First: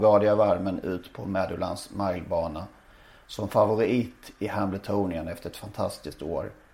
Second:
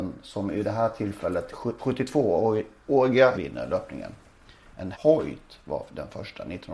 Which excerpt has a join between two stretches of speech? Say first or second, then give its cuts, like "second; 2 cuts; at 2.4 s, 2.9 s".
second; 3 cuts; at 1.8 s, 3.3 s, 4.9 s